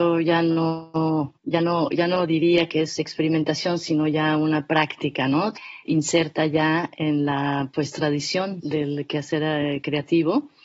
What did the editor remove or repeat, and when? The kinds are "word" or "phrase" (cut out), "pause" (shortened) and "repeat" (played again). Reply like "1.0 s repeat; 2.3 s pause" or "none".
1.4 s pause